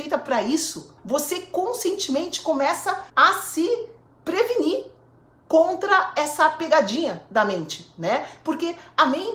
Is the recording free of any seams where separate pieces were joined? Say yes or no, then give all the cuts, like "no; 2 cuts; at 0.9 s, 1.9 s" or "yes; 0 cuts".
no; 3 cuts; at 1.0 s, 3.1 s, 4.1 s